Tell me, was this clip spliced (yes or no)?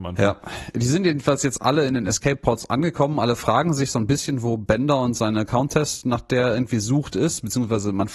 no